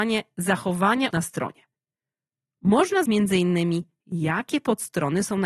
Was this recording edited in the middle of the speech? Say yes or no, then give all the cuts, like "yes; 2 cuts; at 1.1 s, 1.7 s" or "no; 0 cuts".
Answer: yes; 2 cuts; at 1.1 s, 3.1 s